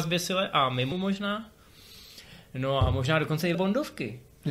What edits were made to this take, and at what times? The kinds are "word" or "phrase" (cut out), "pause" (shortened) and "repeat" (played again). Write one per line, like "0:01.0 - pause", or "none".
0:00.9 - word
0:03.5 - word